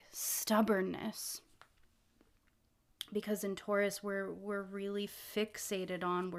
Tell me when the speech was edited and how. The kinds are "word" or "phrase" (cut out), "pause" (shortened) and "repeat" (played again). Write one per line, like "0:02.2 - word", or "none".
none